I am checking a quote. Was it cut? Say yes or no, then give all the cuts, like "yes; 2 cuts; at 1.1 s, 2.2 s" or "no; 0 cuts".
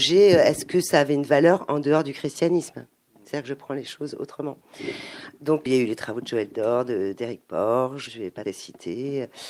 yes; 3 cuts; at 5.7 s, 8.1 s, 8.4 s